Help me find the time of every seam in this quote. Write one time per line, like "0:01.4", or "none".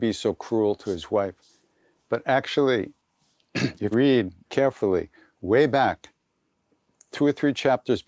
0:03.9
0:04.5

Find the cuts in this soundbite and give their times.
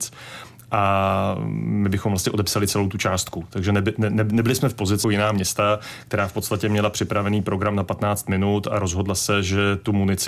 0:05.0

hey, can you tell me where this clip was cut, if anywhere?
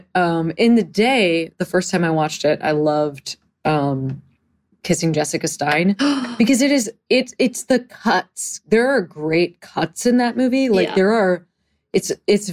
none

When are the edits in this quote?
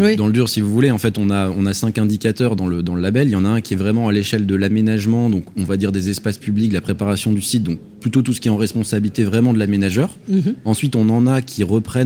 none

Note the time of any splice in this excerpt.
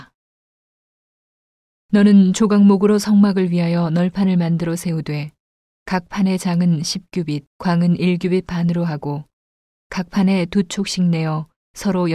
0:07.5

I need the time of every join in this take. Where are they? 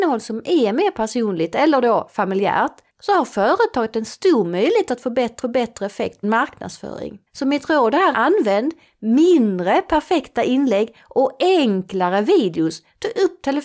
0:02.9
0:05.4
0:06.2
0:07.3
0:08.1

